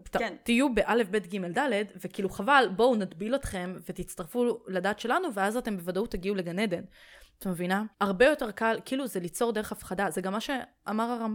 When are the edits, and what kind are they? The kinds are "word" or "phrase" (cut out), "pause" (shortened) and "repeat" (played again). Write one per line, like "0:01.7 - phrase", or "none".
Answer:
0:07.9 - pause

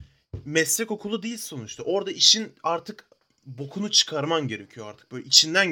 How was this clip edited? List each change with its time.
none

